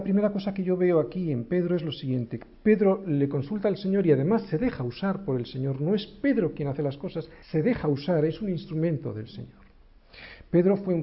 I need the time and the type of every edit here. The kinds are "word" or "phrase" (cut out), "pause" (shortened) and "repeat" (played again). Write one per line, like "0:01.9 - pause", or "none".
0:07.4 - pause